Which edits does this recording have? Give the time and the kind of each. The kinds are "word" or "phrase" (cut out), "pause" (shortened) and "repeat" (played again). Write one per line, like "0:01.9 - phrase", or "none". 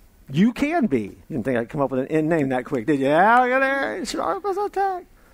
0:01.2 - pause